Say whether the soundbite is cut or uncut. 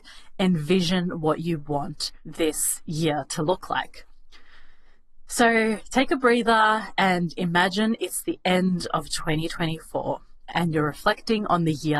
uncut